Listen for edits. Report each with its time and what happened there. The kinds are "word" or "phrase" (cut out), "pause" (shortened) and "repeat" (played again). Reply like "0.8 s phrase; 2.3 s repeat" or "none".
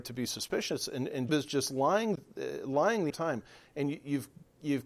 1.3 s word; 3.1 s word